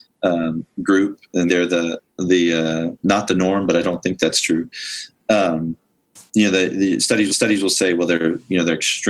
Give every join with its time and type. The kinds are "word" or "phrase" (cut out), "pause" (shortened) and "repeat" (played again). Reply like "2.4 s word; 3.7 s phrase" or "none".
1.5 s word; 2.1 s pause; 7.3 s repeat

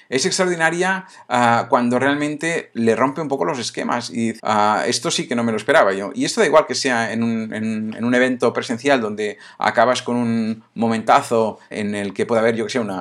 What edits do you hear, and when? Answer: 4.4 s word; 11.7 s word

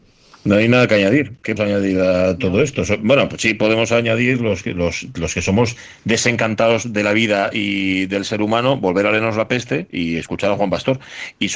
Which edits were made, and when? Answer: 1.6 s word

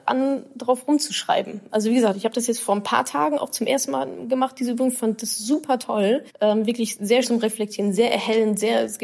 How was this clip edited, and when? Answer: 6.3 s pause; 7.2 s word

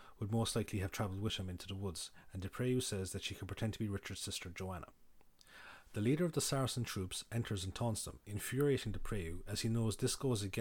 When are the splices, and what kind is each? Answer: none

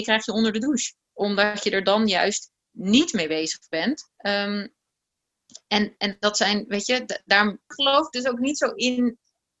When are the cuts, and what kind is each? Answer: 1.0 s pause; 4.2 s pause

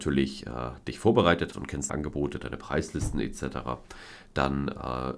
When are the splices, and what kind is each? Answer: 1.5 s word; 1.9 s word

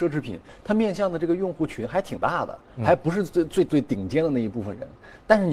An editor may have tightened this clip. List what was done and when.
3.7 s word

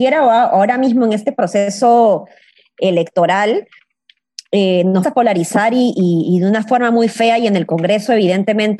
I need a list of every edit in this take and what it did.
5.0 s word

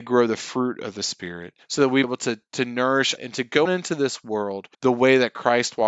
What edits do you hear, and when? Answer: 1.6 s pause; 2.0 s phrase; 3.2 s word; 3.6 s word; 4.7 s pause

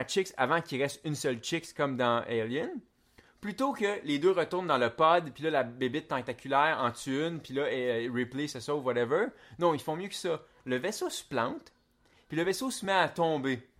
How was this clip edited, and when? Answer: none

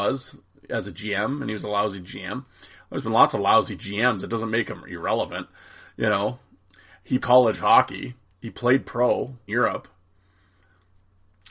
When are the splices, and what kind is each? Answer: 7.2 s word; 9.5 s word

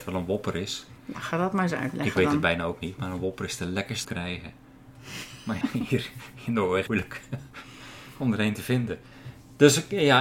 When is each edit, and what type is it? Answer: 1.0 s pause; 4.0 s phrase; 5.6 s word; 6.9 s phrase

